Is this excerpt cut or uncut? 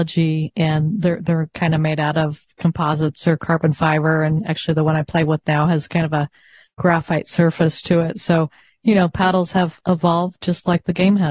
uncut